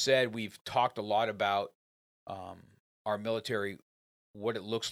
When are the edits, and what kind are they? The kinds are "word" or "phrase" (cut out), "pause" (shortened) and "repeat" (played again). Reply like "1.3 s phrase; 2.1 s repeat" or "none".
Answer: none